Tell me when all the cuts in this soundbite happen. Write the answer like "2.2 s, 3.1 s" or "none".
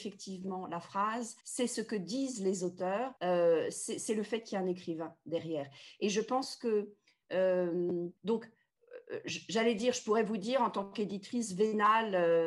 1.4 s, 3.2 s, 8.2 s